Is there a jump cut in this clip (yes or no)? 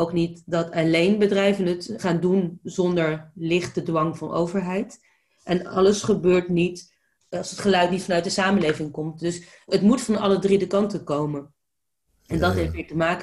no